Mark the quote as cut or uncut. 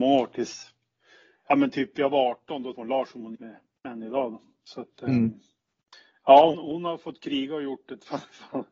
cut